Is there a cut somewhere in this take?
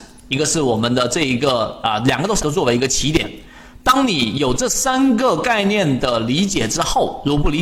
yes; 1 cut; at 2.4 s

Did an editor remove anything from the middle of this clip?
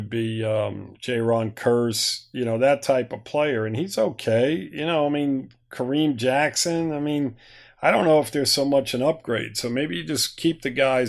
no; 0 cuts

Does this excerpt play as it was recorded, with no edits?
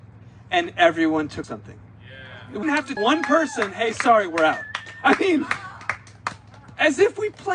no; 3 cuts; at 1.4 s, 2.6 s, 3.0 s

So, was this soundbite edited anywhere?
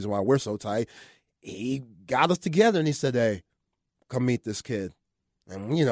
no; 0 cuts

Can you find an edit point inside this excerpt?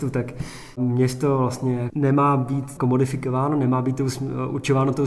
no; 0 cuts

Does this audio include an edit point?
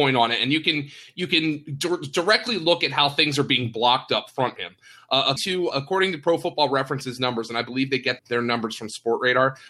yes; 4 cuts; at 4.6 s, 5.4 s, 5.7 s, 8.2 s

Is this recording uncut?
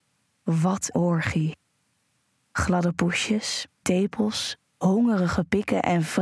no; 3 cuts; at 0.9 s, 3.8 s, 4.7 s

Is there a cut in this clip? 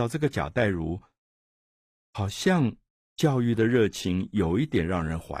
no; 0 cuts

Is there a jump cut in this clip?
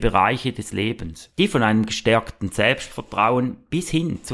no; 0 cuts

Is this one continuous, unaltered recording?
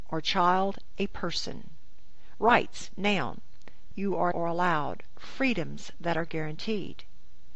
no; 2 cuts; at 3.9 s, 4.3 s

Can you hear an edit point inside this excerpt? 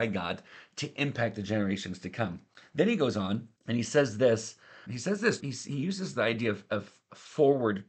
yes; 3 cuts; at 3.6 s, 4.9 s, 5.4 s

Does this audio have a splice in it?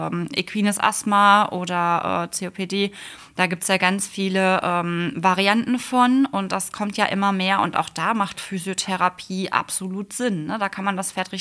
no; 0 cuts

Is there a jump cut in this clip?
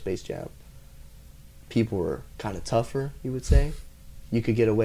no; 0 cuts

